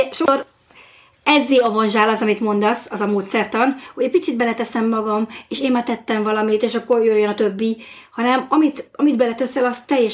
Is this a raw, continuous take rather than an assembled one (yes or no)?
yes